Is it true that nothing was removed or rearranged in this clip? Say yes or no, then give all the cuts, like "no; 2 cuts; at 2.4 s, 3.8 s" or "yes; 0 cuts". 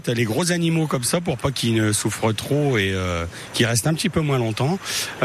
yes; 0 cuts